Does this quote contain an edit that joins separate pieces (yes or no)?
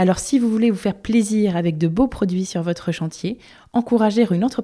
no